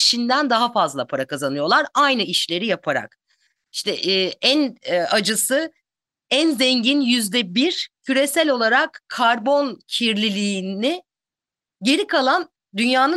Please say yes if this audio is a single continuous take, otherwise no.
yes